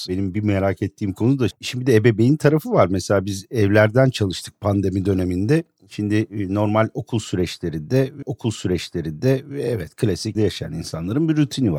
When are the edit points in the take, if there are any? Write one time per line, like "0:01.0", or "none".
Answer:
0:01.5
0:08.2
0:10.3